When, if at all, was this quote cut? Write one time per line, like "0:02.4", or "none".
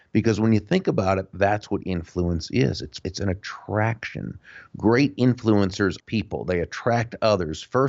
0:03.0
0:06.0